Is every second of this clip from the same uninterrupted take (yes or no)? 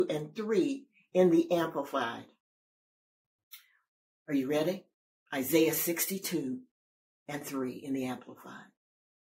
yes